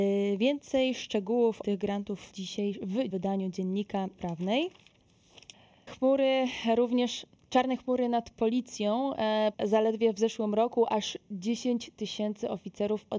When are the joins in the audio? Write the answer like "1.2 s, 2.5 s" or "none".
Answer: 1.6 s, 2.3 s, 3.1 s, 4.2 s, 5.9 s, 9.5 s